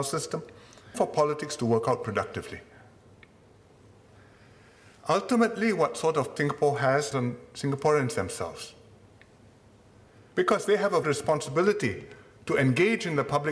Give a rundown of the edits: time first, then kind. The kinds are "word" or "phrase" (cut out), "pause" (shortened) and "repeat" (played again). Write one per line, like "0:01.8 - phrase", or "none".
0:00.9 - word
0:06.4 - word
0:07.1 - word
0:11.0 - word